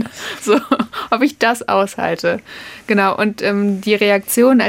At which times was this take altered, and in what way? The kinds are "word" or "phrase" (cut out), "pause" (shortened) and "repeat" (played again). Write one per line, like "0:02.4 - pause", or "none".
none